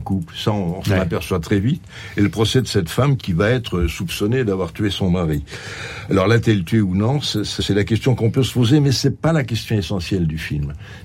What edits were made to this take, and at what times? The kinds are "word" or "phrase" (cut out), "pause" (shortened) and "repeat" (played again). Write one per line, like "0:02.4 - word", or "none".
0:03.2 - word
0:07.6 - word